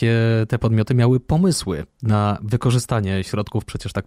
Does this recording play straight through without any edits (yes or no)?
yes